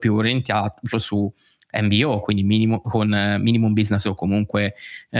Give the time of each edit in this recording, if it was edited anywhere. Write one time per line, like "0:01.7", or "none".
0:00.9
0:04.0